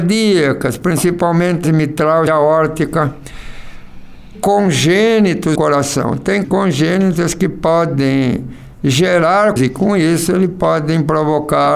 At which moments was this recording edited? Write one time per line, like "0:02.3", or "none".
0:01.6
0:02.3
0:04.3
0:05.5
0:06.4
0:09.6